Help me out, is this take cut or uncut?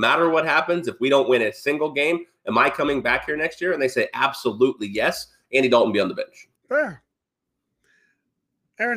cut